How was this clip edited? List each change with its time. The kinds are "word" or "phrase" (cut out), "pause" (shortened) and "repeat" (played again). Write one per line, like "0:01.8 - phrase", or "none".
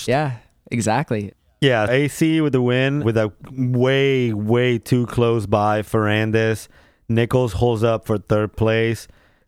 0:01.9 - word